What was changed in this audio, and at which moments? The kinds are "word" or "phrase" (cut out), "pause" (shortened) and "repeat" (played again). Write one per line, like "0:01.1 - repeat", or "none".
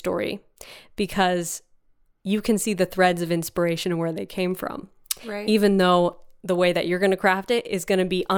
none